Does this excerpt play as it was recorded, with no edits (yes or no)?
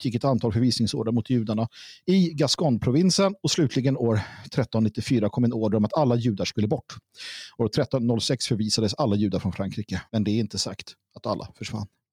no